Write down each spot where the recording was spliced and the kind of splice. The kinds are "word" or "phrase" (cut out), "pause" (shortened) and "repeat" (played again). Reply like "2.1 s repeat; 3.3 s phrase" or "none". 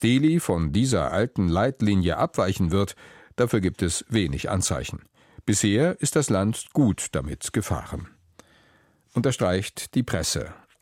none